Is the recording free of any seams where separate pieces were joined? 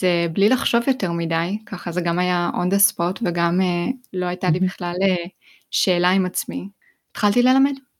yes; 0 cuts

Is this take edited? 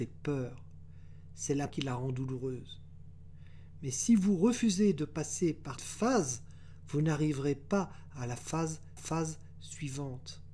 yes; 3 cuts; at 1.7 s, 5.8 s, 9.0 s

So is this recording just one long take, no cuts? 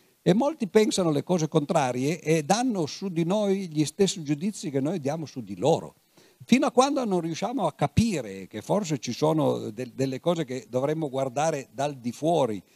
yes; 0 cuts

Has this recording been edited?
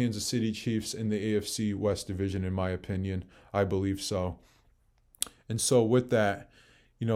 no; 0 cuts

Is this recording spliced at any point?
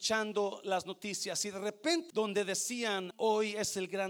yes; 2 cuts; at 2.1 s, 3.1 s

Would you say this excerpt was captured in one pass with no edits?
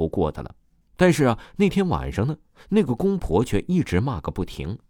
yes; 0 cuts

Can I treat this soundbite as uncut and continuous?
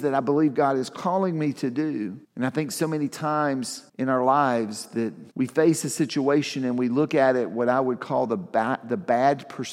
no; 3 cuts; at 2.2 s, 3.9 s, 5.3 s

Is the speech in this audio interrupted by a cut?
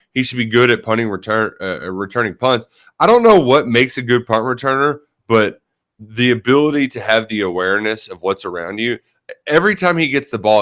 no; 0 cuts

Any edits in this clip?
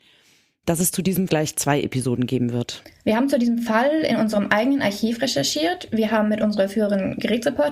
yes; 1 cut; at 1.3 s

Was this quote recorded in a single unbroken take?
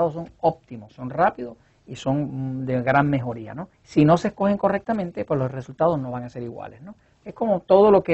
no; 1 cut; at 3.7 s

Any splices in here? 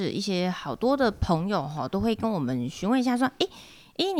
no; 0 cuts

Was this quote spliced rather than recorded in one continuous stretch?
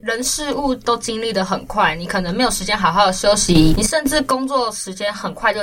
no; 0 cuts

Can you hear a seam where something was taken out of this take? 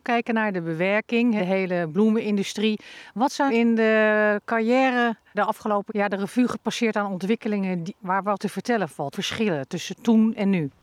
yes; 7 cuts; at 1.4 s, 3.5 s, 5.3 s, 5.9 s, 8.0 s, 8.4 s, 9.1 s

